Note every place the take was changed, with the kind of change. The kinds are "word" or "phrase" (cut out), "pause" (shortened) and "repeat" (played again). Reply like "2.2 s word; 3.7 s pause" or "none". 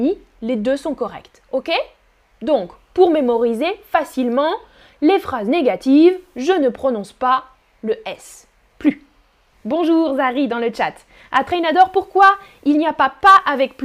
none

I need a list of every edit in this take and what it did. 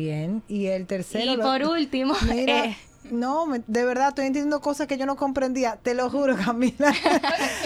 none

